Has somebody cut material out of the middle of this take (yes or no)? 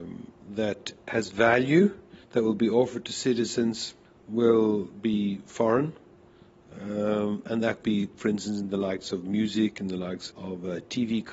yes